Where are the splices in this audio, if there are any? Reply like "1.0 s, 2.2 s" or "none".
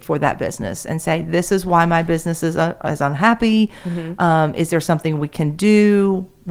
none